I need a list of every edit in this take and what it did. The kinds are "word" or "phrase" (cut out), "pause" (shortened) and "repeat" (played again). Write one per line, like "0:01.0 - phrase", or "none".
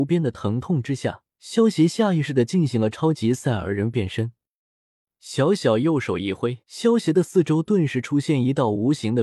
0:01.3 - pause
0:06.6 - pause